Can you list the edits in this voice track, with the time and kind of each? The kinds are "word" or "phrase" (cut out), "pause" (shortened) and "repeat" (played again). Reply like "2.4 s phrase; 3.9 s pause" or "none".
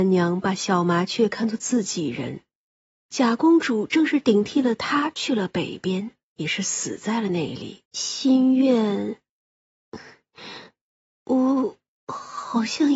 7.9 s pause